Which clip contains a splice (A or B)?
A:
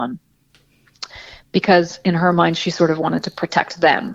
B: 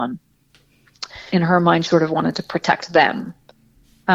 B